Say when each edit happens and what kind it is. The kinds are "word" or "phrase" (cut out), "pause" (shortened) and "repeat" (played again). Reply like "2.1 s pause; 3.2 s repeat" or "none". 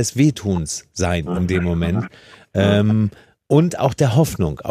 none